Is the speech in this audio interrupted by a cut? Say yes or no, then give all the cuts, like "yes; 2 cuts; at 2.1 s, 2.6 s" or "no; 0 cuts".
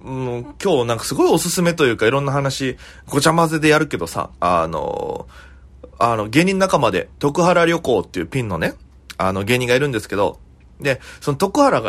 yes; 2 cuts; at 4.3 s, 7.1 s